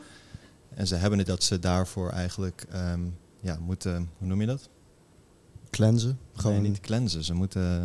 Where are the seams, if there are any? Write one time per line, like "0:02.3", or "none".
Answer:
0:01.3
0:05.7

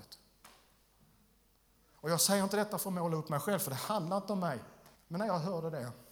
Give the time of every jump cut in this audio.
0:05.0

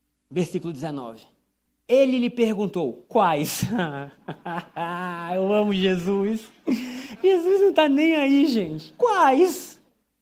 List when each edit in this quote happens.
0:01.7

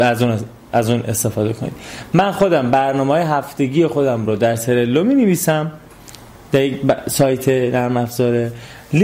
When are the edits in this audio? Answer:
none

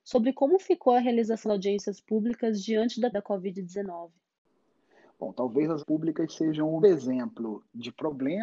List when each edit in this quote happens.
0:01.4
0:03.1
0:05.8
0:06.8

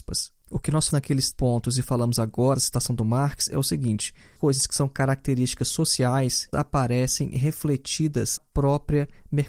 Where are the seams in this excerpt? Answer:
0:00.9
0:01.3
0:02.6
0:04.4
0:06.5
0:08.4

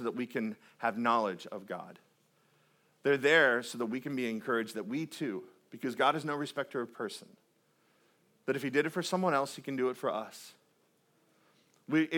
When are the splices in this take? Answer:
none

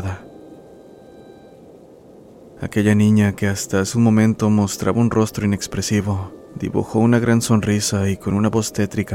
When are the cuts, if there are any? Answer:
none

